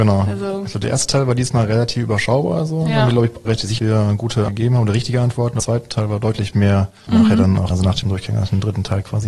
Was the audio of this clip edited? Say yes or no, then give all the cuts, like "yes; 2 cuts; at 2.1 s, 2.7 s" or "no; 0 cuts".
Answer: yes; 7 cuts; at 3.4 s, 3.8 s, 4.5 s, 5.6 s, 7.1 s, 7.7 s, 8.0 s